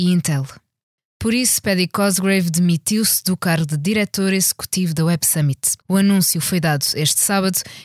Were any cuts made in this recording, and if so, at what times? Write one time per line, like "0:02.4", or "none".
0:05.8

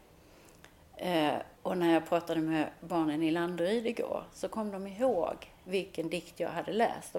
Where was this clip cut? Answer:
0:01.6

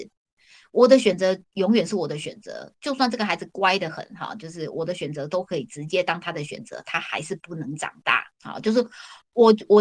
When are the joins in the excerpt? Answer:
0:08.4

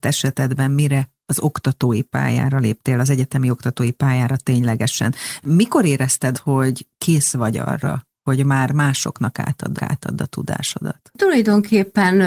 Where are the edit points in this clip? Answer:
0:06.3
0:09.8

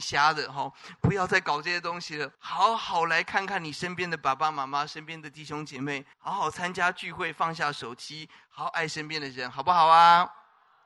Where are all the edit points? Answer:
0:02.3
0:06.1

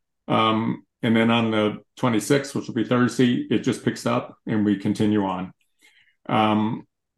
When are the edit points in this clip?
0:00.9

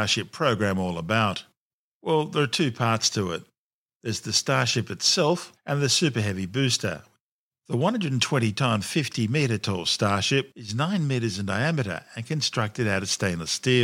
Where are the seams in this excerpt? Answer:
none

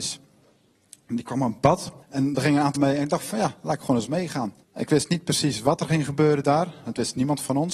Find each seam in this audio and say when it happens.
0:02.0
0:02.8
0:04.6

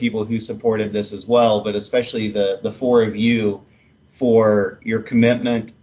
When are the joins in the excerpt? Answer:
none

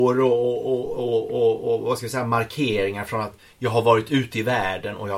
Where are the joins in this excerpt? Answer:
none

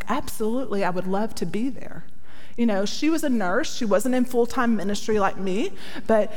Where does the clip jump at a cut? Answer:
none

